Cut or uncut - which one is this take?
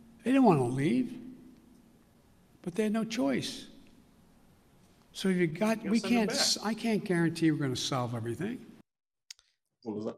uncut